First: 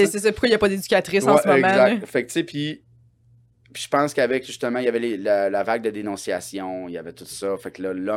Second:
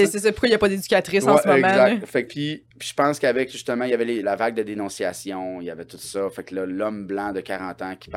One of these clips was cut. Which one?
second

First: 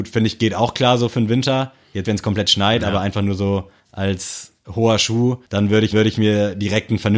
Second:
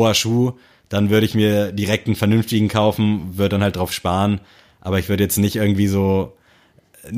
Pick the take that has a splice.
first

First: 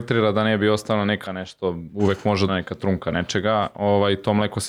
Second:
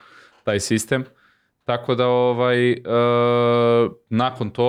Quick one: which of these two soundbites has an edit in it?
first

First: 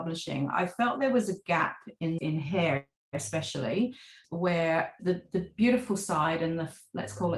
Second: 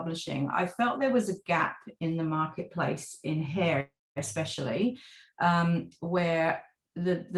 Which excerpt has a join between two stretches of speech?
first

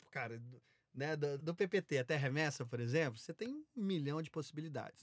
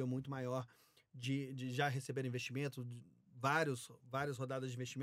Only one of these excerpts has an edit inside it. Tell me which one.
first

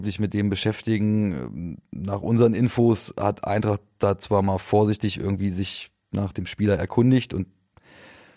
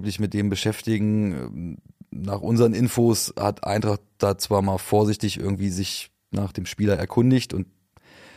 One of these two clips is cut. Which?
first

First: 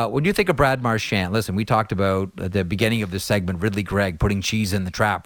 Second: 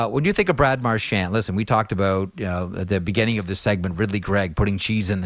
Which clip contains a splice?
first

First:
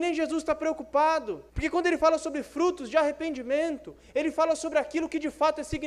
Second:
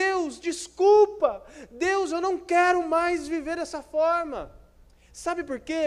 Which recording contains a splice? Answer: first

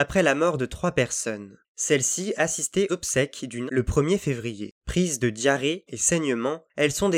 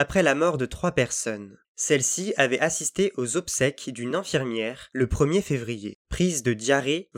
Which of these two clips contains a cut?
first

